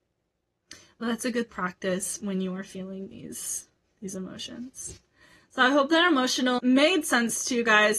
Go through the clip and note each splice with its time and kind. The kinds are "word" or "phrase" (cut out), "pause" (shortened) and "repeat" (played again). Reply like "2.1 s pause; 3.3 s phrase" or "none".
1.5 s phrase; 6.6 s word